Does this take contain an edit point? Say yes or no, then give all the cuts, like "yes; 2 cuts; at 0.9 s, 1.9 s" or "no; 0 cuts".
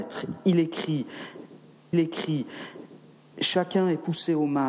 yes; 1 cut; at 1.9 s